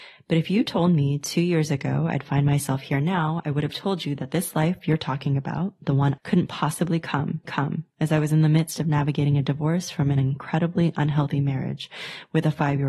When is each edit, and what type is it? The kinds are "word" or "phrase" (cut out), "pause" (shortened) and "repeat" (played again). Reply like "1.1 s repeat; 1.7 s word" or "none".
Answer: 6.2 s phrase; 7.4 s repeat